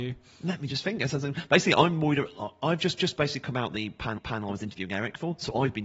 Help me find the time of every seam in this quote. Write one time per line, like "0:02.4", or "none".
0:03.0
0:04.2